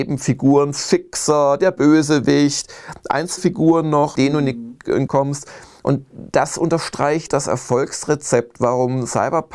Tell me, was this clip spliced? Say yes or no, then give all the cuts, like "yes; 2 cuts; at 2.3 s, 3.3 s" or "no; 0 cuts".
yes; 4 cuts; at 3.4 s, 4.2 s, 5.1 s, 7.3 s